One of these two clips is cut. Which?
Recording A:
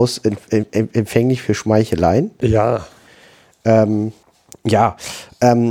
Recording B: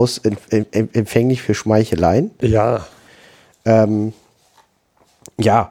A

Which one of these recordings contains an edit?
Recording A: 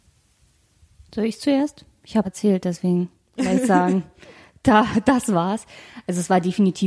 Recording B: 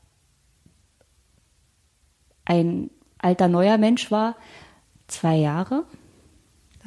A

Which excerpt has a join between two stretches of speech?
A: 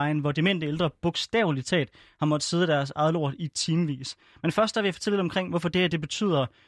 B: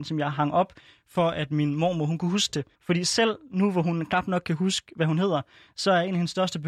B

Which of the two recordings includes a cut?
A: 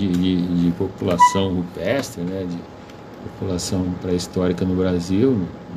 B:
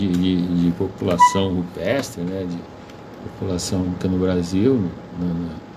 B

